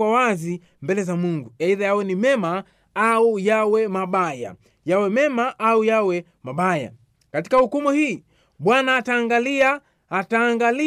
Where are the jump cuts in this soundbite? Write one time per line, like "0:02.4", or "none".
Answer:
none

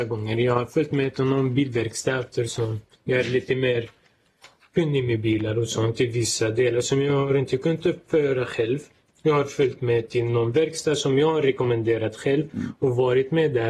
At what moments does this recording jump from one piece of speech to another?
none

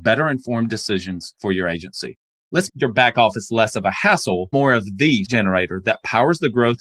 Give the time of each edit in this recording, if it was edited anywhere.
0:02.7
0:04.5
0:05.2

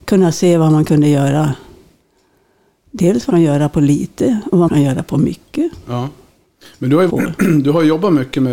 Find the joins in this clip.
0:03.3
0:04.7
0:07.1

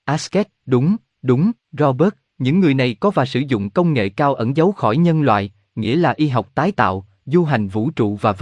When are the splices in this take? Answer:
0:01.6

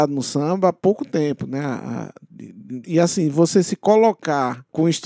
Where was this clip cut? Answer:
0:02.8

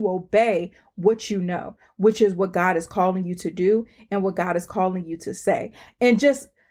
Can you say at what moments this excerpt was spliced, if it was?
none

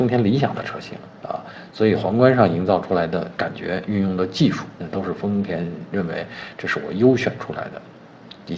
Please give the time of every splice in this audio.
0:04.8

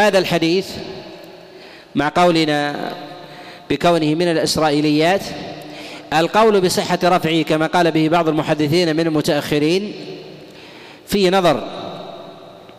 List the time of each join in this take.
none

